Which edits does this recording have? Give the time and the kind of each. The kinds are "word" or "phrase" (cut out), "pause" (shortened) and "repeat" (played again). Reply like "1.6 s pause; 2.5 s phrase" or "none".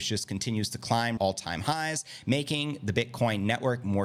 1.2 s word